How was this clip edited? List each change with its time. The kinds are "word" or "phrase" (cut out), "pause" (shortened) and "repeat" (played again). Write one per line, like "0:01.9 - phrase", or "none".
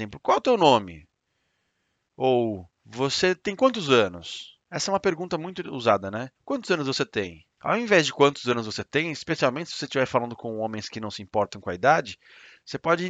0:02.8 - pause
0:04.6 - pause
0:06.4 - pause
0:07.5 - pause

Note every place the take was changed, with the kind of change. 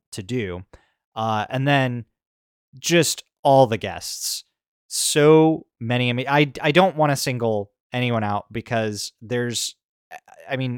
none

